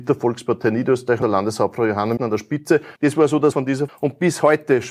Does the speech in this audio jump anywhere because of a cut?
yes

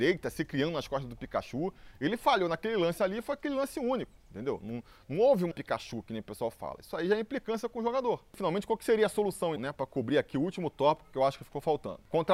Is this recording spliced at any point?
yes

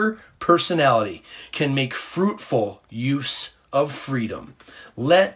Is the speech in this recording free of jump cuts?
yes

